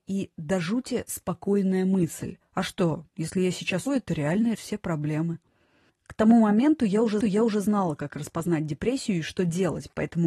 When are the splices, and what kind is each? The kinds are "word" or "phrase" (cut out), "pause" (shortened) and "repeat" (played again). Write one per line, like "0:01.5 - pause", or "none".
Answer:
0:02.4 - pause
0:03.1 - pause
0:03.9 - word
0:04.5 - word
0:07.2 - repeat